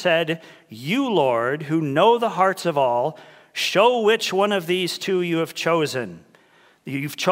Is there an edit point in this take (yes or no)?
no